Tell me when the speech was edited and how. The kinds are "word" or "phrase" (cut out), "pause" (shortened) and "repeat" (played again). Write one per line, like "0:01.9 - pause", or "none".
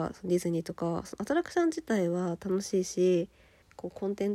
none